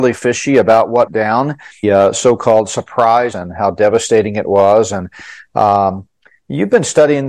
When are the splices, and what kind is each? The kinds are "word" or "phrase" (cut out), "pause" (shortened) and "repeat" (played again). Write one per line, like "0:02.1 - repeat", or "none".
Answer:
0:01.1 - word
0:01.8 - phrase
0:03.3 - phrase